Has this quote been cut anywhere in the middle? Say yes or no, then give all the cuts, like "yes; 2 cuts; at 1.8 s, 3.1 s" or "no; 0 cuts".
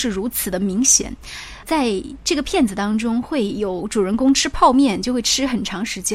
yes; 1 cut; at 1.6 s